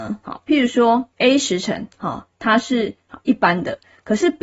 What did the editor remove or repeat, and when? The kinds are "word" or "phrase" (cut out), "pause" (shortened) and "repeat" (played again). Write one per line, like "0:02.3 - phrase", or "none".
0:01.1 - pause